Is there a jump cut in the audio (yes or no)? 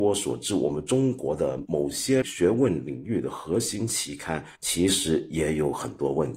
yes